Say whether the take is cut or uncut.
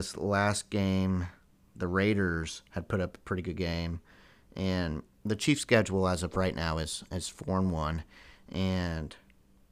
uncut